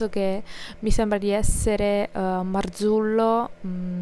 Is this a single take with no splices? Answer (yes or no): yes